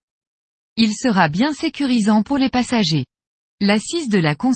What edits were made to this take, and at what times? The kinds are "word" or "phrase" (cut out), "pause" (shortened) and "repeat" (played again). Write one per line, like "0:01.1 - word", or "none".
none